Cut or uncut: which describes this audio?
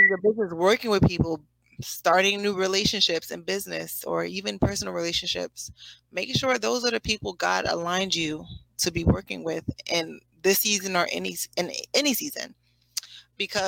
uncut